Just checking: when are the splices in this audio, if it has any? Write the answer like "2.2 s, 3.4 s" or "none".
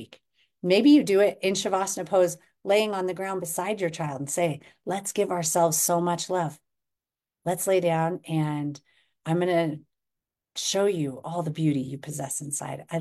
none